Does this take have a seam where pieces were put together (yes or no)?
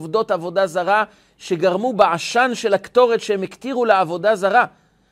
no